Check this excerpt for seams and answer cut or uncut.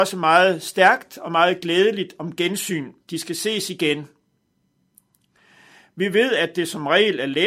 cut